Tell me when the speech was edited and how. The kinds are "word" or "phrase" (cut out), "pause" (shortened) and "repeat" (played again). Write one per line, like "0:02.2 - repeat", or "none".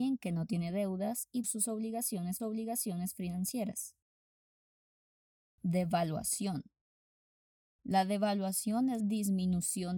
0:01.4 - phrase
0:02.4 - repeat
0:09.0 - word